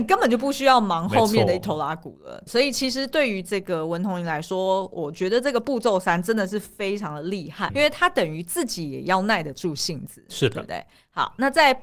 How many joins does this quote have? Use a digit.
2